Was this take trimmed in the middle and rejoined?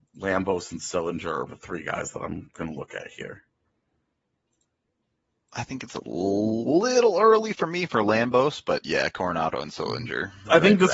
yes; 1 cut; at 1.5 s

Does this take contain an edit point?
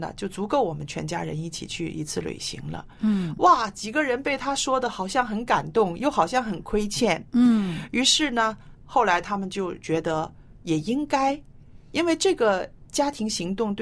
yes; 1 cut; at 8.8 s

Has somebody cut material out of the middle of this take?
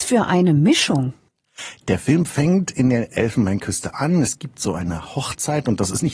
no; 0 cuts

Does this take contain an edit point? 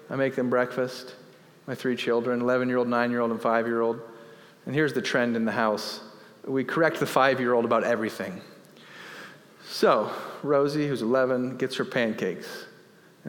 no; 0 cuts

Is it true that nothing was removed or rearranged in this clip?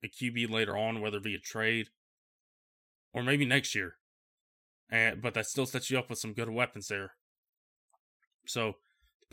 yes; 0 cuts

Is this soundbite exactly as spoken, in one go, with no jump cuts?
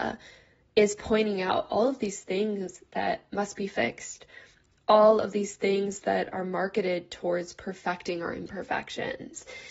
yes; 0 cuts

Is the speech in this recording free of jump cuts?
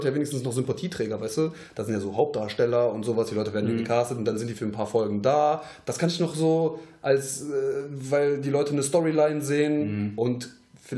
yes; 0 cuts

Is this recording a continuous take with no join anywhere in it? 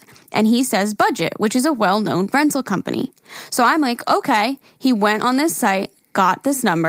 yes; 0 cuts

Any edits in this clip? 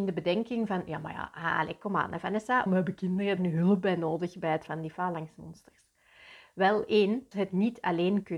yes; 4 cuts; at 2.7 s, 3.4 s, 4.7 s, 7.3 s

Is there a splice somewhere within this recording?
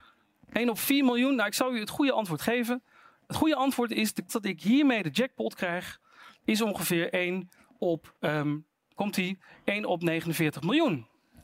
yes; 3 cuts; at 4.3 s, 8.2 s, 9.0 s

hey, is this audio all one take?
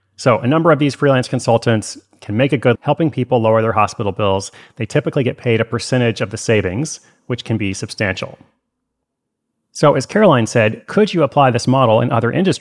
no; 1 cut; at 2.7 s

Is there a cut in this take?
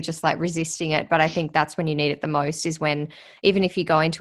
no; 0 cuts

